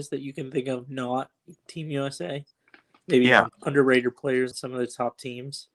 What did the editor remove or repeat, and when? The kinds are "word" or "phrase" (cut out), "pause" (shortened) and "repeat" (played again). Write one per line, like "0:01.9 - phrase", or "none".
0:03.5 - word
0:04.5 - word